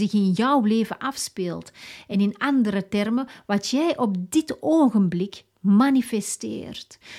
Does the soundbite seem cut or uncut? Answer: uncut